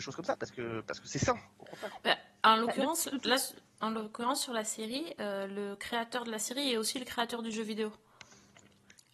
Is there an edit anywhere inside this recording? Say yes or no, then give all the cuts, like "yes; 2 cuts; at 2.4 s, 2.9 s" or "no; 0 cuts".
no; 0 cuts